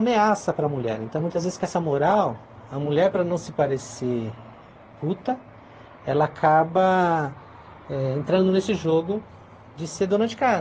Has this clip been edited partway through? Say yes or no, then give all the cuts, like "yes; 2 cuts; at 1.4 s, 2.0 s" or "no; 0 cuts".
no; 0 cuts